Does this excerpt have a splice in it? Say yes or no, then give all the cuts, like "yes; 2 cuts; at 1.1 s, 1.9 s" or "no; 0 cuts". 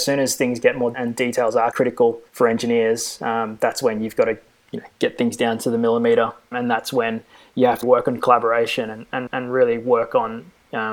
yes; 6 cuts; at 0.9 s, 1.7 s, 2.3 s, 6.5 s, 7.8 s, 9.3 s